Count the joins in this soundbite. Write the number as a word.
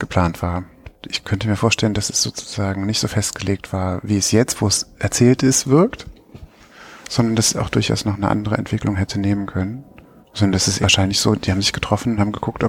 zero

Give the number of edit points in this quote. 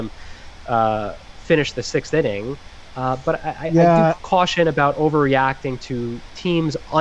zero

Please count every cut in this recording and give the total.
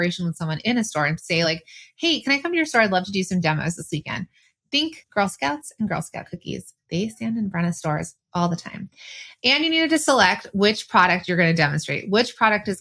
zero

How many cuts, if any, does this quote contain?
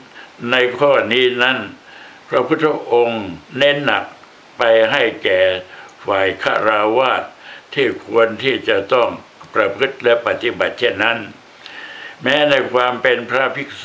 one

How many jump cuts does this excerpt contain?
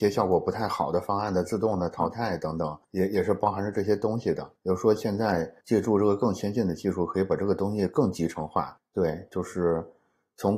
four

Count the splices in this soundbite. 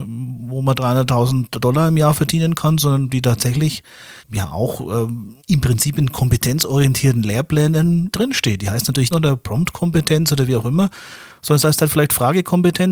four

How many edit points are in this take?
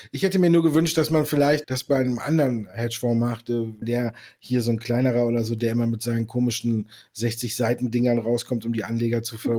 two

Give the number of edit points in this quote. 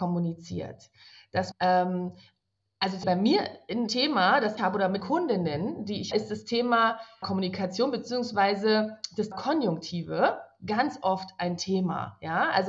eight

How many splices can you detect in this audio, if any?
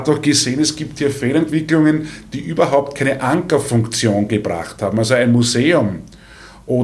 zero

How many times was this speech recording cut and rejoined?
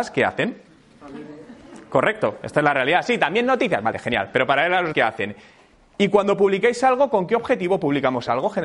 one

